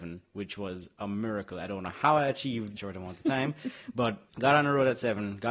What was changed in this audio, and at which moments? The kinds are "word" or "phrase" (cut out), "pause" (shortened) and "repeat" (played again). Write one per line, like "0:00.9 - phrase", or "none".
0:02.8 - phrase
0:04.3 - pause